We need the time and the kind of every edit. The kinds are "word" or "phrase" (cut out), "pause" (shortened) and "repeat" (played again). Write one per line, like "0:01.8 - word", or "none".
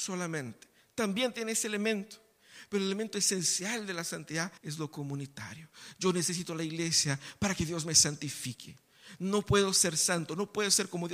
0:04.6 - pause